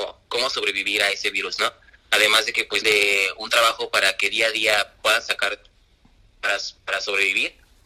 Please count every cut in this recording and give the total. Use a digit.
1